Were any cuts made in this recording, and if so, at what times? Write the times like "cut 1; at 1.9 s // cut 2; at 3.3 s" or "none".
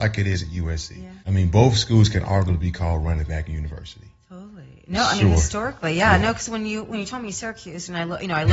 cut 1; at 1.2 s